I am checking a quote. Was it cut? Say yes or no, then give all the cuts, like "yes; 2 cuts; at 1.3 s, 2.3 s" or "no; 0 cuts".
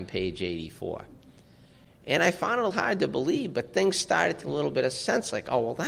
yes; 2 cuts; at 2.7 s, 4.4 s